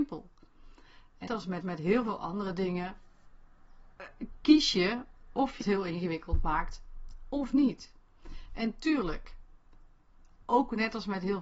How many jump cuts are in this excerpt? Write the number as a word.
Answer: three